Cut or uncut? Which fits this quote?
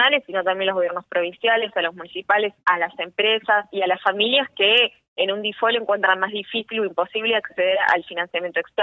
uncut